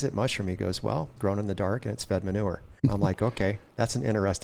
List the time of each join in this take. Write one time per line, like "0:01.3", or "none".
0:01.2
0:02.8